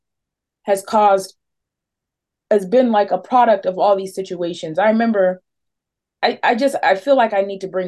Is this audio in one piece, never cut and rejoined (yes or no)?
yes